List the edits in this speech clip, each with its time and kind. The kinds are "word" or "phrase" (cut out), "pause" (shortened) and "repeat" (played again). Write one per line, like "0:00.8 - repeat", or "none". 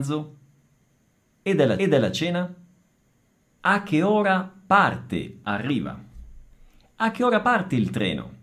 0:01.8 - repeat
0:05.4 - phrase